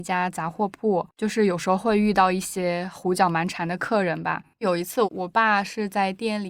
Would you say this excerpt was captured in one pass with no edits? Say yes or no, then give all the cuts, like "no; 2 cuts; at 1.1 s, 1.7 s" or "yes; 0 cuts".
no; 2 cuts; at 1.1 s, 4.5 s